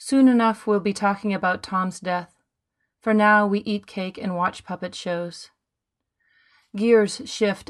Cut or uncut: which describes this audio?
uncut